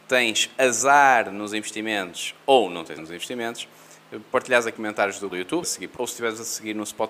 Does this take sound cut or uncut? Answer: cut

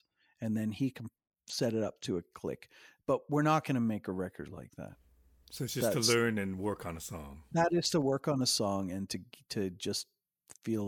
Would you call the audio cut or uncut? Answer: uncut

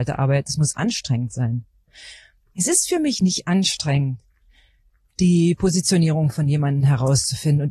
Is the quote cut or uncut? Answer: uncut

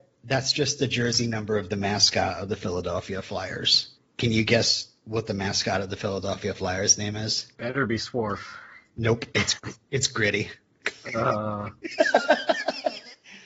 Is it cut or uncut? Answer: cut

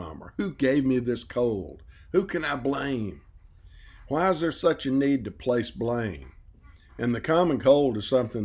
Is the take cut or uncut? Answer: uncut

